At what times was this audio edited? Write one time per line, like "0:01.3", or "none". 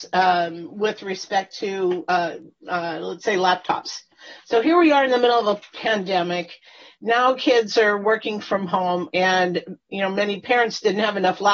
none

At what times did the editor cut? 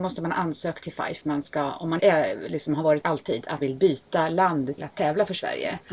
0:01.2
0:02.0
0:03.0
0:03.6
0:04.8

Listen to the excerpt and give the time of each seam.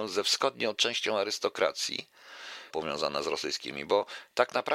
0:02.7

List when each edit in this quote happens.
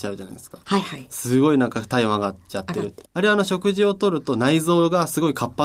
0:03.1

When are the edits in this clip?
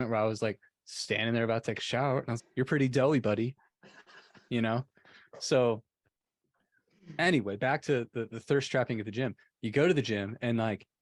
0:02.4

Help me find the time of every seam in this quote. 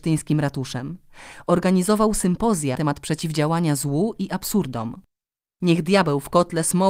0:02.8

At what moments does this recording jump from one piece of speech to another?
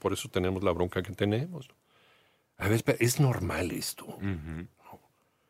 none

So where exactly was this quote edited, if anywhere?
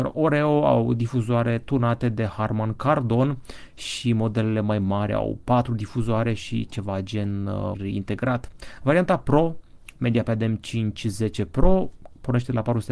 0:07.7

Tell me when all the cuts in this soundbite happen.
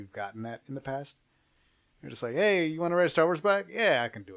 none

